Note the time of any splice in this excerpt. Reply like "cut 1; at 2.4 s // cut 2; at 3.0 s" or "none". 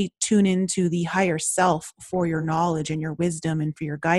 none